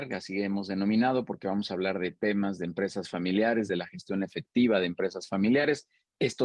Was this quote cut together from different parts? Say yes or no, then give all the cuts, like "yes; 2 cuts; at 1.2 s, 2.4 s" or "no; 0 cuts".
no; 0 cuts